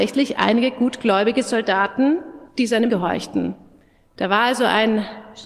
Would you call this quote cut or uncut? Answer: cut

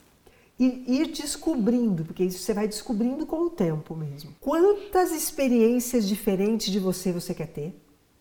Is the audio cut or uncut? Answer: cut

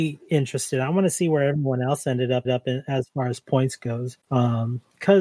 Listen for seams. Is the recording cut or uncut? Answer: cut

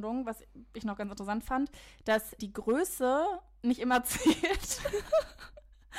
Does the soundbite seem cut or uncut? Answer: uncut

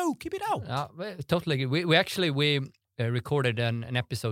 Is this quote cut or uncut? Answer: uncut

